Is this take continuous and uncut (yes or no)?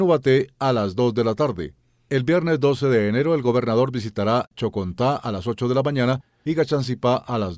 yes